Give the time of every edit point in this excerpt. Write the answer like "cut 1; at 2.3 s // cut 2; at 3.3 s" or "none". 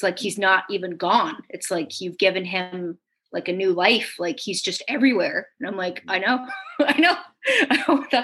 none